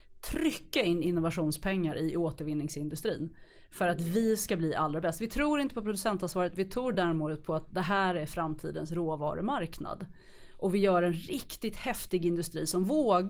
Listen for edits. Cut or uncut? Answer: uncut